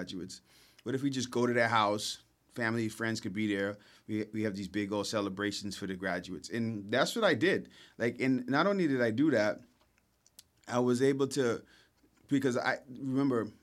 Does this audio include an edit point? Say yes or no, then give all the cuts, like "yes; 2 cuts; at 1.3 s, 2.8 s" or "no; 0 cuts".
no; 0 cuts